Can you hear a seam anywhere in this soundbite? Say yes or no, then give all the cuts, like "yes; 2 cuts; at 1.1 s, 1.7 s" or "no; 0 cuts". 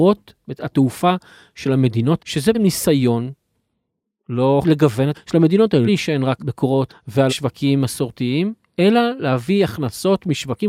yes; 8 cuts; at 2.2 s, 2.5 s, 4.6 s, 5.1 s, 5.9 s, 6.4 s, 6.9 s, 7.3 s